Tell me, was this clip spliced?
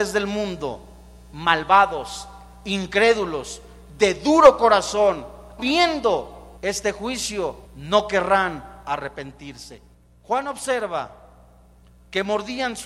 yes; 4 cuts; at 5.6 s, 6.6 s, 7.6 s, 9.9 s

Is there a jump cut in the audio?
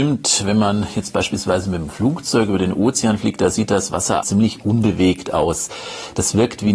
yes; 1 cut; at 4.2 s

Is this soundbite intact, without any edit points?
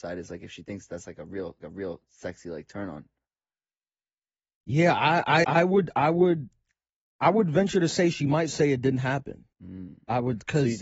no; 3 cuts; at 1.6 s, 5.4 s, 9.5 s

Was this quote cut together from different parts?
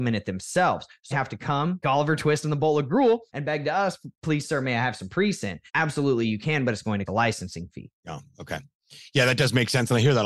yes; 6 cuts; at 1.1 s, 1.8 s, 3.3 s, 5.7 s, 7.1 s, 7.9 s

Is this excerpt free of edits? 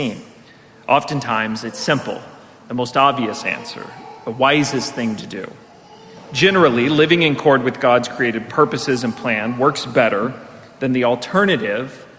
yes; 0 cuts

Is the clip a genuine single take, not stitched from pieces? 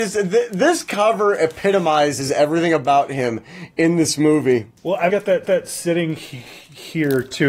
no; 3 cuts; at 4.8 s, 5.1 s, 5.4 s

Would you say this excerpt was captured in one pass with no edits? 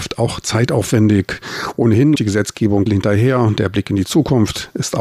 no; 2 cuts; at 2.1 s, 2.9 s

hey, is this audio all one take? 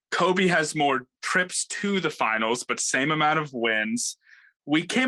yes; 0 cuts

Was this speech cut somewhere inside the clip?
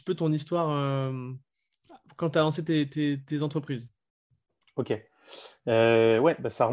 no; 0 cuts

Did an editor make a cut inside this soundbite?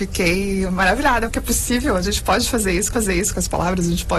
yes; 2 cuts; at 1.3 s, 2.9 s

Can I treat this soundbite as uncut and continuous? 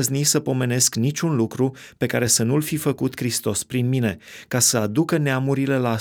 yes; 0 cuts

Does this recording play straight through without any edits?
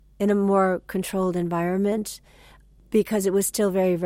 yes; 0 cuts

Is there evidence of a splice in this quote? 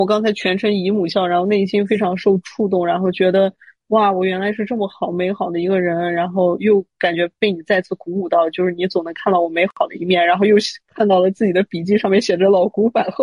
no; 0 cuts

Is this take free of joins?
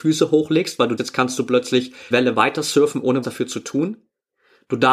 no; 3 cuts; at 1.0 s, 2.1 s, 3.2 s

